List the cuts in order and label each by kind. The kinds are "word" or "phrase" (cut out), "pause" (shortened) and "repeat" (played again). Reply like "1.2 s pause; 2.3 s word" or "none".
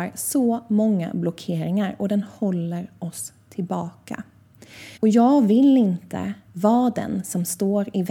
5.0 s pause